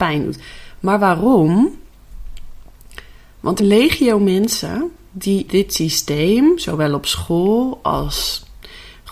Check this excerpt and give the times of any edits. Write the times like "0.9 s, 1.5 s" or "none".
3.6 s, 5.5 s